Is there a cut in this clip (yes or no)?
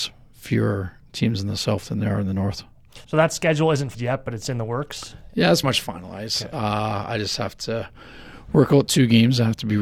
yes